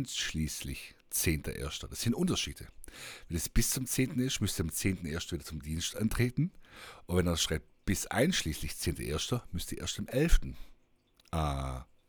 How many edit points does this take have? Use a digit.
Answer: 1